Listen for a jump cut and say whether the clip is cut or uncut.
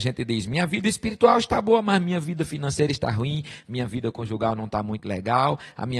uncut